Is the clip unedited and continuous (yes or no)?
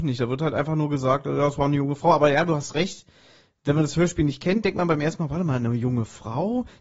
yes